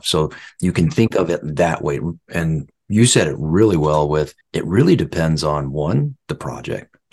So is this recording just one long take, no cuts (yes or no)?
no